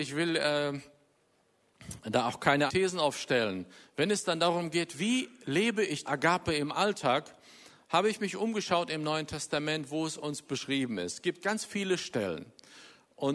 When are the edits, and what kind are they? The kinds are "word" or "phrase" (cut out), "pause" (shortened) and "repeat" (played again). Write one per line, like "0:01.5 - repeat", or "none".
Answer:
0:02.7 - word
0:06.0 - word
0:10.4 - word